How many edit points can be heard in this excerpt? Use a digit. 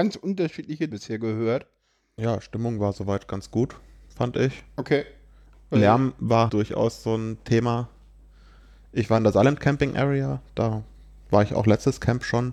2